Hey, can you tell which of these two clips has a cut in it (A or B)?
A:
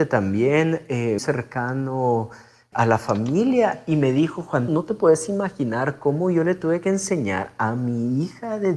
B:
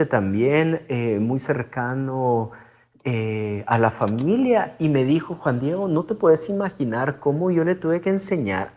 A